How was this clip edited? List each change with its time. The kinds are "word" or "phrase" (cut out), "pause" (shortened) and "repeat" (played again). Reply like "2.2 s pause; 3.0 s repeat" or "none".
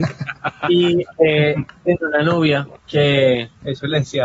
1.8 s word; 2.8 s pause

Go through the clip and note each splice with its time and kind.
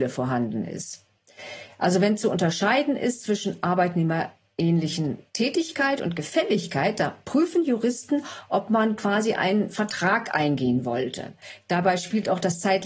5.3 s pause

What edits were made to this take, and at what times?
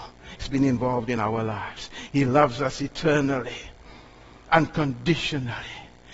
none

